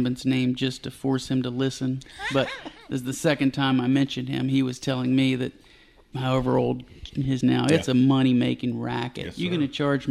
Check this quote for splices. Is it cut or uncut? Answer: cut